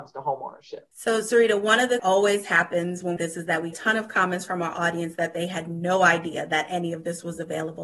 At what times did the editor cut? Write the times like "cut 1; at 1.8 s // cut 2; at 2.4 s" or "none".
cut 1; at 0.9 s // cut 2; at 2.0 s // cut 3; at 3.2 s // cut 4; at 3.7 s